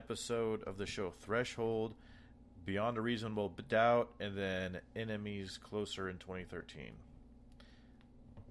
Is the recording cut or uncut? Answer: uncut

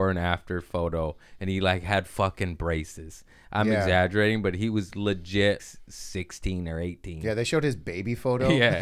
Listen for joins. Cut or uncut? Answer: cut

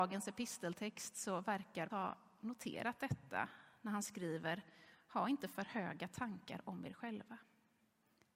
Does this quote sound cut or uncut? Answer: cut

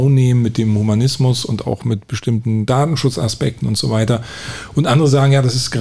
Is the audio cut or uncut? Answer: uncut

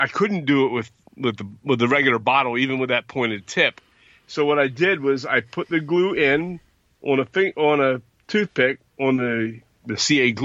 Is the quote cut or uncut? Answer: uncut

